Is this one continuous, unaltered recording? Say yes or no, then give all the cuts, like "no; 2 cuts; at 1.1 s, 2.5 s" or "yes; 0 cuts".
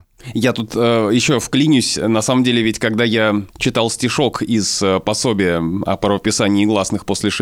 yes; 0 cuts